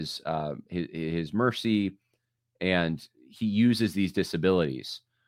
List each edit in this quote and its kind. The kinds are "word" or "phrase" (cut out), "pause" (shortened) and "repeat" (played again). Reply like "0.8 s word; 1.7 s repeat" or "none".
none